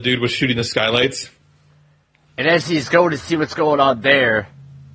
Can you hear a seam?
no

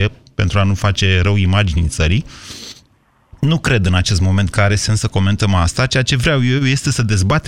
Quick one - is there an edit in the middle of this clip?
no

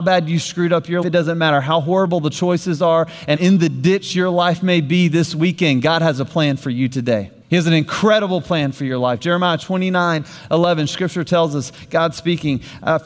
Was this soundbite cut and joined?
yes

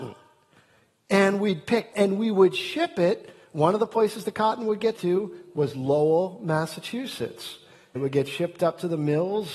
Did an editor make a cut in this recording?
yes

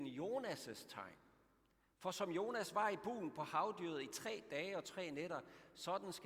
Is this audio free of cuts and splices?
yes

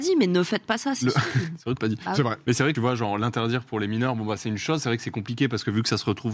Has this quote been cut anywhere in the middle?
yes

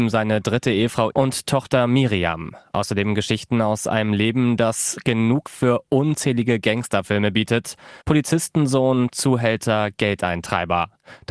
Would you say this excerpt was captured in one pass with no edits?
no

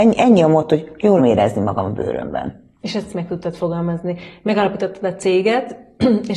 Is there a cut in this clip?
yes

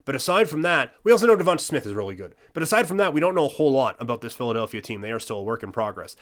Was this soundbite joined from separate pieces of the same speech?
no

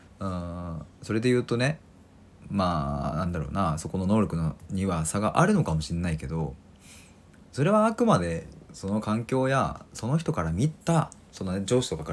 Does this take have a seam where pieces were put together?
yes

